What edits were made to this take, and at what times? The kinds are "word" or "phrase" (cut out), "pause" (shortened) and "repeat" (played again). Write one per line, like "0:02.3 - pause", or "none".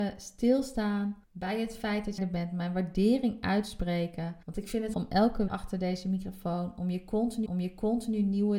0:01.2 - pause
0:02.2 - word
0:04.4 - pause
0:04.9 - word
0:05.5 - phrase
0:07.5 - repeat